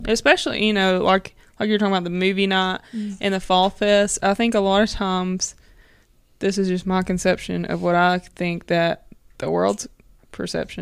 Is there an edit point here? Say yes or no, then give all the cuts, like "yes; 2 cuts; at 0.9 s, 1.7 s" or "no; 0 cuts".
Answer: yes; 1 cut; at 6.0 s